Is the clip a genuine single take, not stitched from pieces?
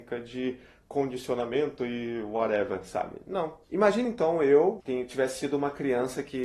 yes; 0 cuts

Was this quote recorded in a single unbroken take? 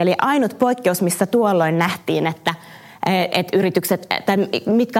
yes; 0 cuts

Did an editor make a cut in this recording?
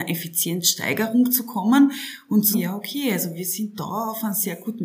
yes; 1 cut; at 2.5 s

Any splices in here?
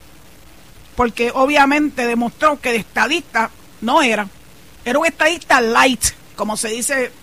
no; 0 cuts

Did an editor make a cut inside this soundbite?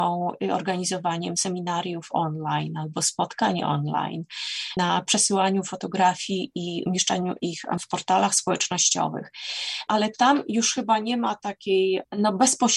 no; 0 cuts

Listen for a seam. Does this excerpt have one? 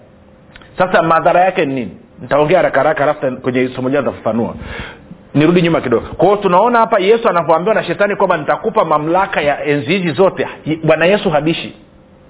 yes; 1 cut; at 2.1 s

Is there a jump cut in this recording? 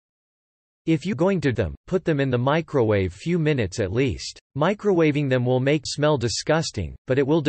yes; 5 cuts; at 1.1 s, 1.5 s, 3.1 s, 4.5 s, 5.9 s

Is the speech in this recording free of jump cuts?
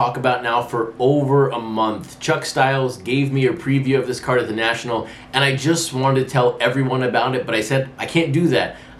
yes; 0 cuts

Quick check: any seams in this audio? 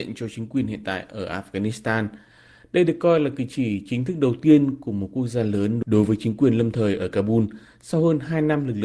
no; 0 cuts

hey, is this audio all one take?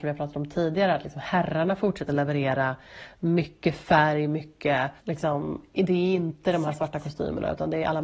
no; 1 cut; at 5.0 s

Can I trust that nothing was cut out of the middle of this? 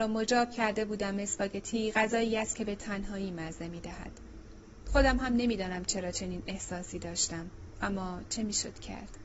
yes; 0 cuts

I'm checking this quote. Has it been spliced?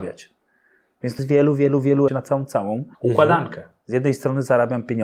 yes; 3 cuts; at 1.2 s, 2.1 s, 2.9 s

